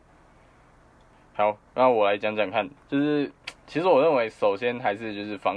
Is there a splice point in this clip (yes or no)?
yes